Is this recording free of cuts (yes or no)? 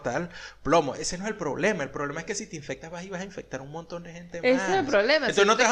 yes